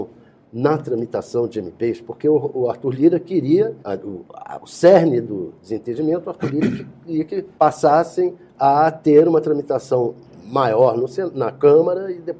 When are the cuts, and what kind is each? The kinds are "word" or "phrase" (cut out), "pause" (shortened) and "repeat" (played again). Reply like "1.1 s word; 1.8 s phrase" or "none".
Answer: 3.8 s pause; 5.6 s pause; 7.6 s pause